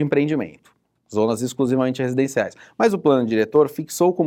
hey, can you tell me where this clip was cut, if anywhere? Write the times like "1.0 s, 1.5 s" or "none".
none